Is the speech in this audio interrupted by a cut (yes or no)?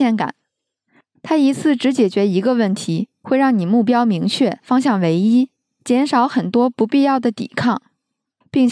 no